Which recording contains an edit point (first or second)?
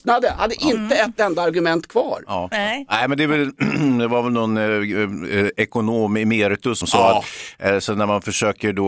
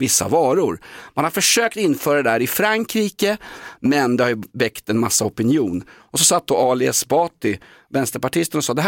first